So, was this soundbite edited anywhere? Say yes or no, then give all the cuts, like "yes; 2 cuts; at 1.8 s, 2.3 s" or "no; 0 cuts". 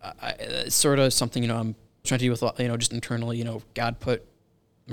yes; 1 cut; at 2.0 s